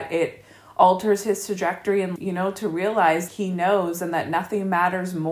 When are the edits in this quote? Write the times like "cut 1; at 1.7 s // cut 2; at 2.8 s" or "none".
cut 1; at 2.2 s // cut 2; at 3.3 s